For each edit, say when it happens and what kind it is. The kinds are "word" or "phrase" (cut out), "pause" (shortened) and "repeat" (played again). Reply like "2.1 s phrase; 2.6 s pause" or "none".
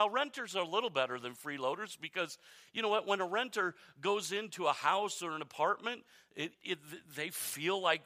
6.5 s word